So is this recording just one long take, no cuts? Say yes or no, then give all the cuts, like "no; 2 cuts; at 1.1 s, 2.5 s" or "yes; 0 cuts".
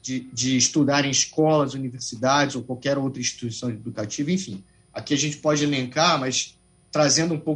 yes; 0 cuts